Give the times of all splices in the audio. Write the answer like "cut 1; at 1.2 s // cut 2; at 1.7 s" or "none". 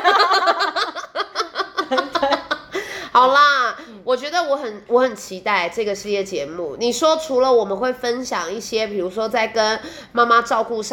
none